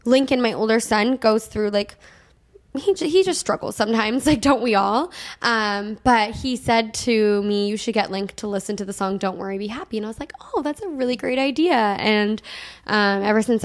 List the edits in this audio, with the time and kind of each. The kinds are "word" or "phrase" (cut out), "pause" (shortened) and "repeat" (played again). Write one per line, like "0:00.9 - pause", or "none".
none